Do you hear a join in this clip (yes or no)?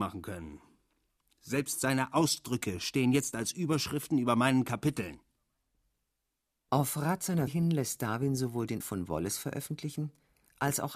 yes